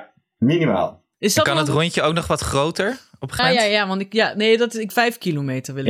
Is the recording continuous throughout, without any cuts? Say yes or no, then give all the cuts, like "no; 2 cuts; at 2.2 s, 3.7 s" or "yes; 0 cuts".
no; 3 cuts; at 1.1 s, 3.4 s, 4.9 s